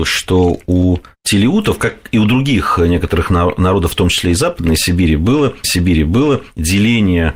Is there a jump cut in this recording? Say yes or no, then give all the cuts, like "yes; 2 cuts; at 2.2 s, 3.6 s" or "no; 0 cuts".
yes; 1 cut; at 5.6 s